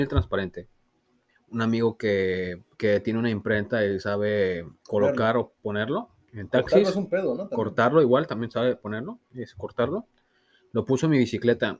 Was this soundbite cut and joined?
yes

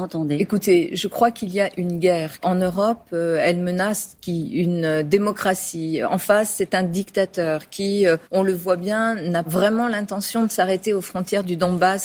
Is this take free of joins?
no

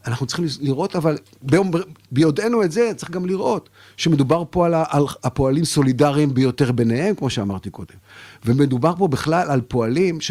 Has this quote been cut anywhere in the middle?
no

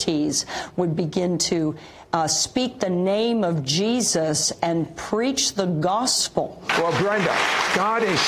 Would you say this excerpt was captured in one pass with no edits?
yes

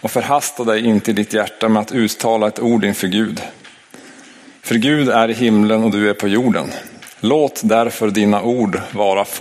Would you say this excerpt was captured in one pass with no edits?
yes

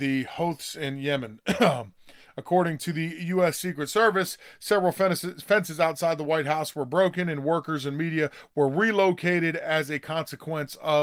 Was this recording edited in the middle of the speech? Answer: no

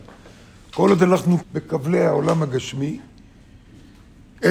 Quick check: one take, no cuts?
no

